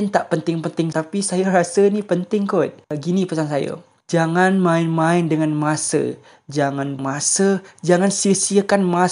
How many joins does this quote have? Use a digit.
3